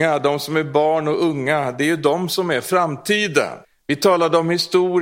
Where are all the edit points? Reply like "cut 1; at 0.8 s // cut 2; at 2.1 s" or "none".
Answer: cut 1; at 3.6 s

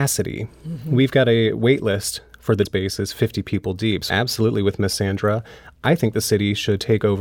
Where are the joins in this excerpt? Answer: cut 1; at 2.7 s // cut 2; at 4.1 s

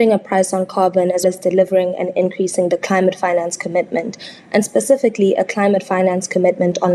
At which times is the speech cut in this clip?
cut 1; at 1.2 s

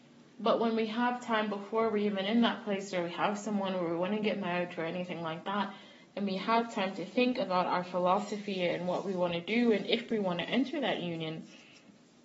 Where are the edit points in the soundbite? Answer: none

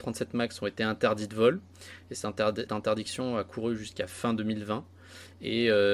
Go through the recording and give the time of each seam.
cut 1; at 2.7 s

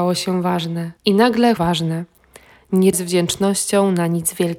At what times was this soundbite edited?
cut 1; at 1.0 s // cut 2; at 1.6 s // cut 3; at 2.9 s

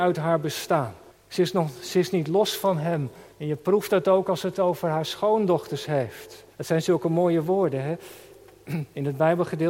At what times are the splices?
cut 1; at 1.1 s // cut 2; at 3.3 s // cut 3; at 6.5 s

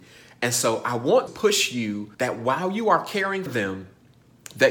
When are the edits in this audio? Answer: cut 1; at 1.3 s // cut 2; at 2.1 s // cut 3; at 3.5 s

